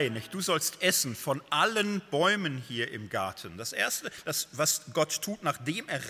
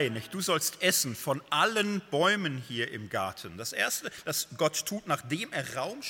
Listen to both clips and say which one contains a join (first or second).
second